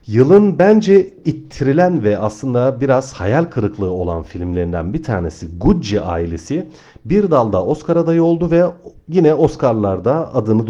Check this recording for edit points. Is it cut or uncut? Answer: uncut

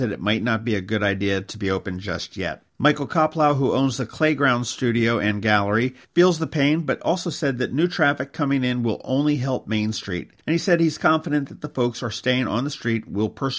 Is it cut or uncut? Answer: cut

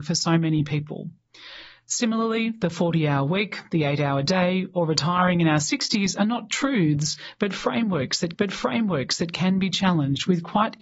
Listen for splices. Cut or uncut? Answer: cut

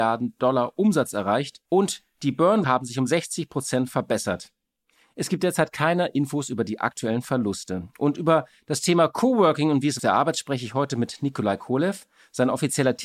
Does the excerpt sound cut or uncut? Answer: cut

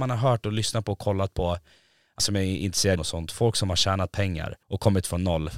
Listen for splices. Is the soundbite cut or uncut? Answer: cut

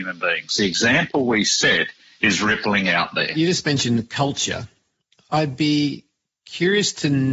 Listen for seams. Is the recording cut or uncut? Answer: uncut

